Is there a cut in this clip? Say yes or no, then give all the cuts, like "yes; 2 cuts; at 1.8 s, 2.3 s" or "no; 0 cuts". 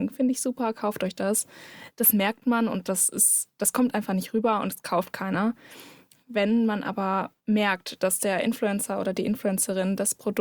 yes; 1 cut; at 7.4 s